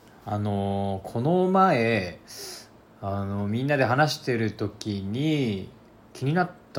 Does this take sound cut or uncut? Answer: uncut